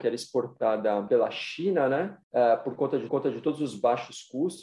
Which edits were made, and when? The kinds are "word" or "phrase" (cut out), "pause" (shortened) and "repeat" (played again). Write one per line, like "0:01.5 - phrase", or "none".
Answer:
0:01.1 - word
0:02.2 - pause
0:03.1 - repeat